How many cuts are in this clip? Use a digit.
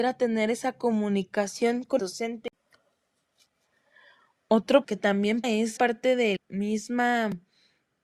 5